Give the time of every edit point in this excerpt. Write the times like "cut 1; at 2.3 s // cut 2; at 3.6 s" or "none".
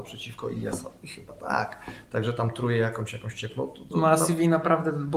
cut 1; at 3.9 s